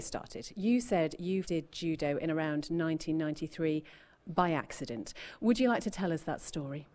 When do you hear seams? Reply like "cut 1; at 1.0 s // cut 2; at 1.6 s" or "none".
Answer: cut 1; at 1.4 s